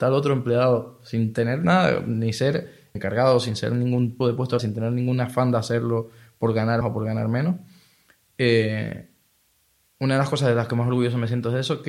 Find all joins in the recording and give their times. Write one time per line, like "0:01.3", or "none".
0:02.9
0:04.2
0:04.6
0:06.8